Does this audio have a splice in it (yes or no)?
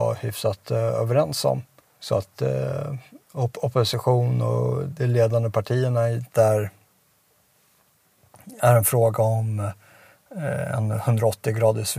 yes